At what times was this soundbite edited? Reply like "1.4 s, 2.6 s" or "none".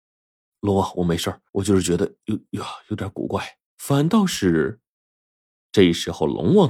1.5 s, 3.7 s